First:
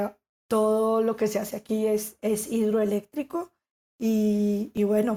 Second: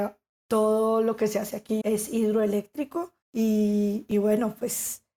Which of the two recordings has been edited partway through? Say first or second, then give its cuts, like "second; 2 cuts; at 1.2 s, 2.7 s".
second; 2 cuts; at 1.8 s, 3.2 s